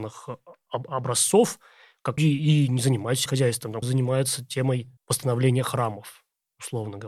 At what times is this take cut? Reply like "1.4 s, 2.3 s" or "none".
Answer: 2.2 s, 3.3 s, 3.8 s, 5.0 s